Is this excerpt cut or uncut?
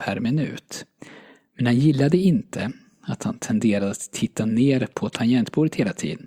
uncut